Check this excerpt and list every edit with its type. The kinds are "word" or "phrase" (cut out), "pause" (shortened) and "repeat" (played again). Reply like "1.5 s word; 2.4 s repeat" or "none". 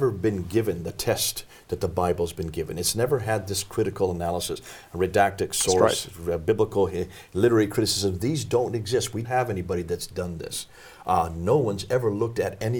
9.2 s word